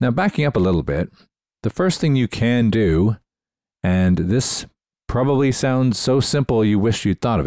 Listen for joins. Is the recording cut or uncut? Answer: uncut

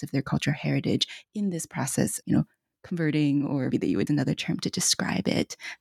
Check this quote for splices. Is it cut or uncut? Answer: cut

